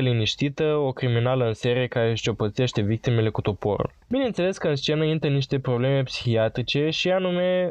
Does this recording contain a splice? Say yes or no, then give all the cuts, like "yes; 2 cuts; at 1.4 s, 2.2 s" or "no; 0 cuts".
no; 0 cuts